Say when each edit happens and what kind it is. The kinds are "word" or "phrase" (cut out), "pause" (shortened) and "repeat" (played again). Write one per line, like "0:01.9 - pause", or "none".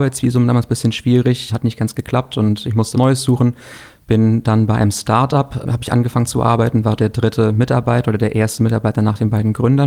0:01.5 - word
0:02.9 - word
0:05.6 - word
0:07.0 - word